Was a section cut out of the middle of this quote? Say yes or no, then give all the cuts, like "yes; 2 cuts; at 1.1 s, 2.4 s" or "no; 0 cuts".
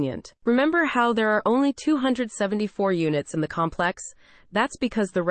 no; 0 cuts